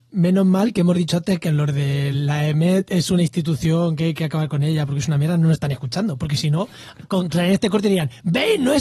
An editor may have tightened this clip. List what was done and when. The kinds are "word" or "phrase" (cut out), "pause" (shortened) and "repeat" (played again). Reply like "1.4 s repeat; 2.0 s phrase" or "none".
none